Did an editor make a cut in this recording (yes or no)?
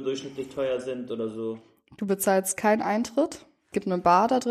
no